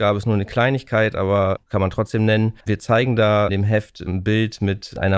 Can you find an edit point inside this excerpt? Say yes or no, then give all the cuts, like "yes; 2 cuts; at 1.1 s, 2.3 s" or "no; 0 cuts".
yes; 3 cuts; at 1.6 s, 2.6 s, 3.5 s